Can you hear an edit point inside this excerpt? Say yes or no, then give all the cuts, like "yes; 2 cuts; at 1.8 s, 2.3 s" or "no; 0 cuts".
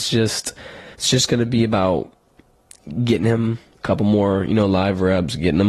yes; 1 cut; at 0.9 s